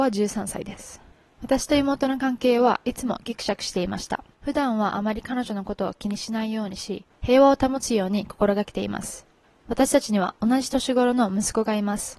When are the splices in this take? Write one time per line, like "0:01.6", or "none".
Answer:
0:04.3